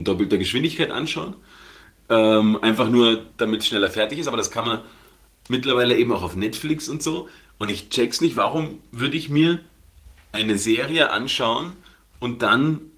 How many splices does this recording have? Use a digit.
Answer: 0